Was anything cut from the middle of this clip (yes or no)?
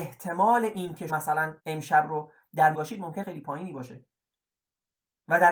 yes